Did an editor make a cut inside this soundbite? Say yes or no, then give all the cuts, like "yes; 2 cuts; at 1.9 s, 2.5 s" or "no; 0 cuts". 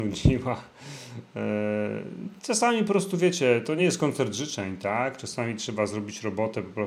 no; 0 cuts